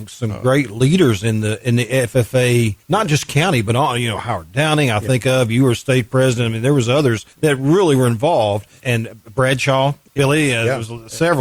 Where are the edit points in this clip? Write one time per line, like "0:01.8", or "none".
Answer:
0:02.8
0:07.3
0:10.2